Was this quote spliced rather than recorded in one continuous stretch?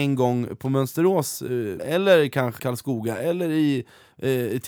yes; 2 cuts; at 1.8 s, 2.6 s

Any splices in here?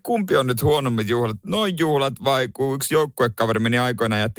no; 0 cuts

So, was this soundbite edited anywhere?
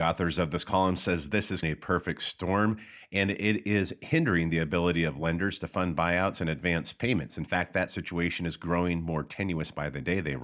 yes; 1 cut; at 1.6 s

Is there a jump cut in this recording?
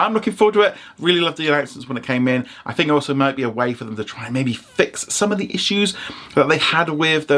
no; 0 cuts

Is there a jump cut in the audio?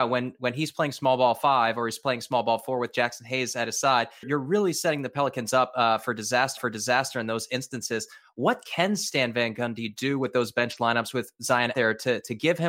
yes; 3 cuts; at 4.2 s, 6.6 s, 11.7 s

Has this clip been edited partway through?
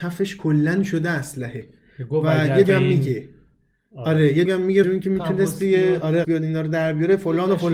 yes; 4 cuts; at 2.6 s, 4.5 s, 4.8 s, 6.2 s

